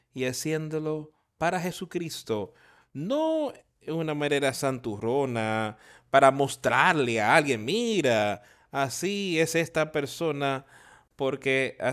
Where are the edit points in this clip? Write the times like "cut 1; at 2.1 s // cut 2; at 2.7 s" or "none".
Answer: none